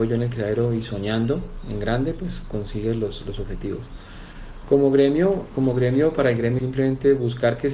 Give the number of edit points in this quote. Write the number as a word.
one